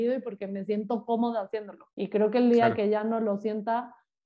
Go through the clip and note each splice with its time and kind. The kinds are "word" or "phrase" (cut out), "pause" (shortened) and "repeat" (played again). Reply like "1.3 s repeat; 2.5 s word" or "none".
1.9 s pause